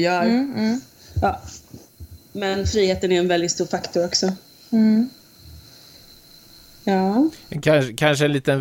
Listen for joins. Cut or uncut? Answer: uncut